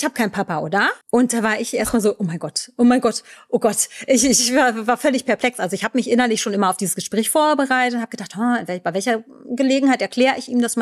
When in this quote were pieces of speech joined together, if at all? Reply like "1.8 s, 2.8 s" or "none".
1.0 s